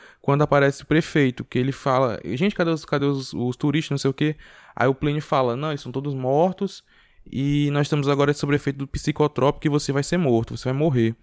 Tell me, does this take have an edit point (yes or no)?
no